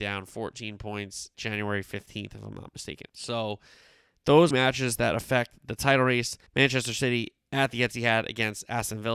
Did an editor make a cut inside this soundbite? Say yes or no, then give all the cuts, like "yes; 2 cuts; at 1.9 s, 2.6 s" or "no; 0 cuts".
yes; 4 cuts; at 1.3 s, 3.1 s, 4.5 s, 6.5 s